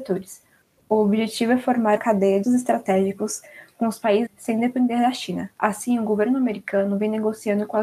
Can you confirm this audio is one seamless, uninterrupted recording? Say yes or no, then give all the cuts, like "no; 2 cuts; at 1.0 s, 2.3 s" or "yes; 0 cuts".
no; 3 cuts; at 2.0 s, 2.4 s, 4.3 s